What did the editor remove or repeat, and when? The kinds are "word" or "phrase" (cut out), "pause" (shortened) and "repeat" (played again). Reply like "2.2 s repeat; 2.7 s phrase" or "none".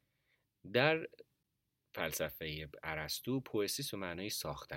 none